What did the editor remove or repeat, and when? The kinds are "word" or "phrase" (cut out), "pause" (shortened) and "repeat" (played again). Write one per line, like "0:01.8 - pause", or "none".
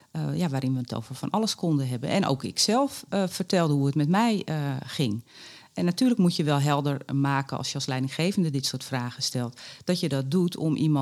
none